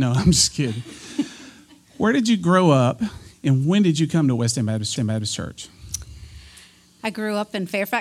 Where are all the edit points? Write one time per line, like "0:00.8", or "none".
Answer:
0:05.0